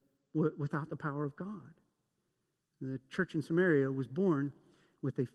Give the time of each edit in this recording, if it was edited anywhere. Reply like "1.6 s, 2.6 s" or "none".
none